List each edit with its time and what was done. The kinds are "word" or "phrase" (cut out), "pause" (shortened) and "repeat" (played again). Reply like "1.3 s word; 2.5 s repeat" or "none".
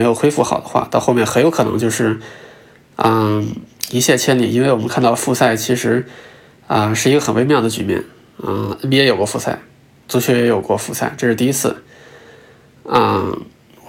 none